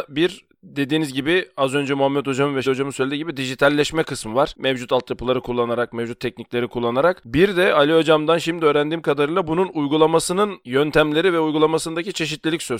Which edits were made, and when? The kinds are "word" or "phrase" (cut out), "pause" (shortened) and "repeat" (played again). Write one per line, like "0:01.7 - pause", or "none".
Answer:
0:02.6 - word